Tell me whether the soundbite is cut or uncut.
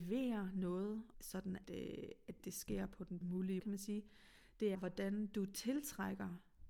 cut